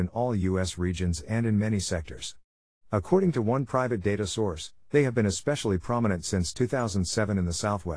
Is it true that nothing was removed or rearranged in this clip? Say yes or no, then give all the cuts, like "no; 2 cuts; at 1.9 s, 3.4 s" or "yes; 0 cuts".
yes; 0 cuts